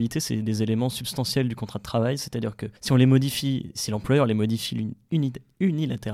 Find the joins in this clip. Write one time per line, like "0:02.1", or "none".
0:02.8